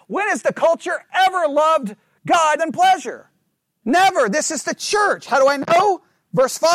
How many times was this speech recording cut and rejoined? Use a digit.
2